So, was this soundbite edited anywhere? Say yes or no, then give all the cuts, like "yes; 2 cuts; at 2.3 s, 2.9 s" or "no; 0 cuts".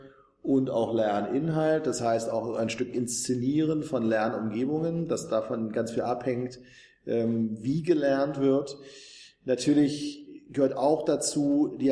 no; 0 cuts